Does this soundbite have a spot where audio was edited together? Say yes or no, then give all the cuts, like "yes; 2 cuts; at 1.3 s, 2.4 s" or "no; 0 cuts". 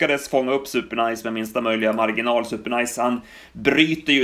no; 0 cuts